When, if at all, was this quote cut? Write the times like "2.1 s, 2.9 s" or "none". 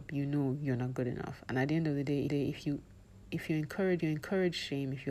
2.3 s, 4.0 s